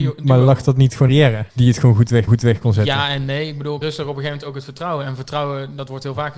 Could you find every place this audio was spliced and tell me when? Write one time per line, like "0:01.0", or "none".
0:01.1
0:01.5
0:02.3
0:03.8